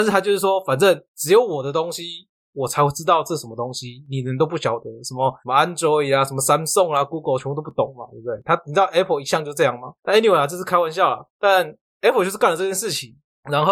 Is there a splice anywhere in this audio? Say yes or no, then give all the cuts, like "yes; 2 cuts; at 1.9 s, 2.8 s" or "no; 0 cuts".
yes; 4 cuts; at 1.1 s, 5.4 s, 10.0 s, 11.3 s